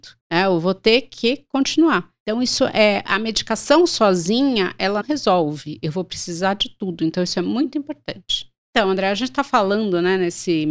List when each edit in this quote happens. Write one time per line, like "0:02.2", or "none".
0:05.0